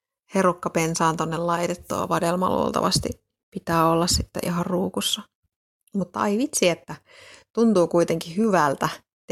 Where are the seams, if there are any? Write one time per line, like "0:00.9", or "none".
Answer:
none

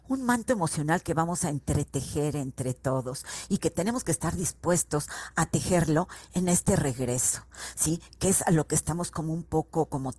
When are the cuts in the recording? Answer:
0:03.6

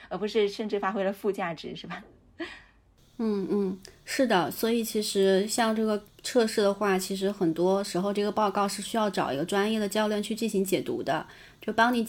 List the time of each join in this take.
0:06.1

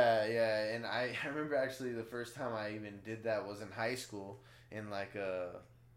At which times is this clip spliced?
none

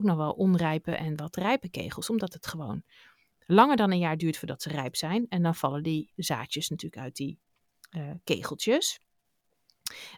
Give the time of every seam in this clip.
none

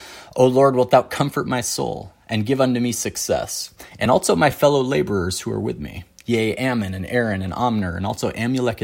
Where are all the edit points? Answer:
none

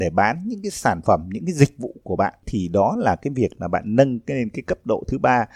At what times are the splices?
none

